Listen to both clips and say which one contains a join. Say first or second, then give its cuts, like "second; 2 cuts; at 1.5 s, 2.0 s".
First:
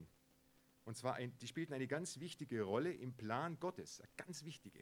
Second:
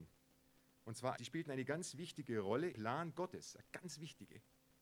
second; 2 cuts; at 1.2 s, 2.7 s